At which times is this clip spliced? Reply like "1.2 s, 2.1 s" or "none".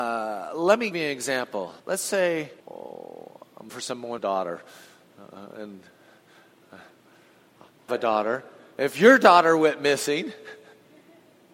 0.9 s, 1.8 s, 2.6 s, 3.7 s, 4.2 s, 7.9 s